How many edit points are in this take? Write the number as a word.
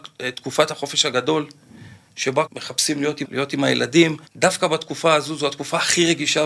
three